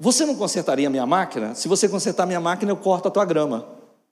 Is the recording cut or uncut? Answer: uncut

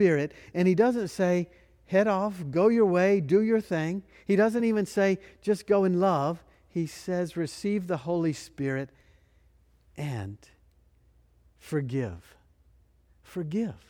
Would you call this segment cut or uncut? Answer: uncut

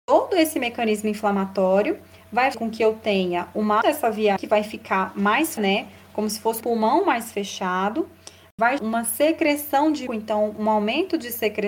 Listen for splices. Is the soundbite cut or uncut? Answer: cut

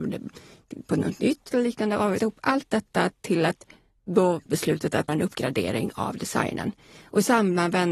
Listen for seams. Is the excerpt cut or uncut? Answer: cut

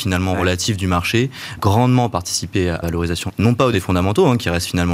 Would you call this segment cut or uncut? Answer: cut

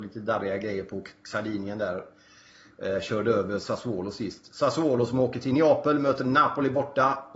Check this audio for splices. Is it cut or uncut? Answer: uncut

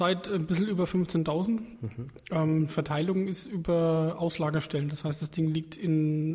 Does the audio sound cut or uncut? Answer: uncut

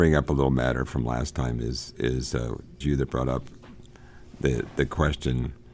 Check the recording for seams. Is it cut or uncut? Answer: cut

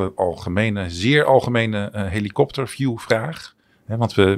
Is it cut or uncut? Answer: uncut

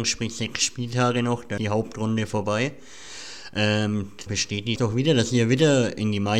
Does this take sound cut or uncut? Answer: cut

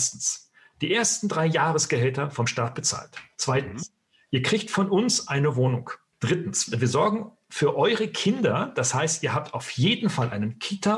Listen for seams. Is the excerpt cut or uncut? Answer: uncut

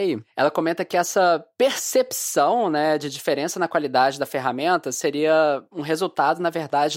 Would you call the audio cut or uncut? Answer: uncut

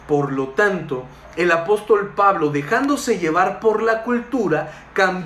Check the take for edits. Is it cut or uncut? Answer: uncut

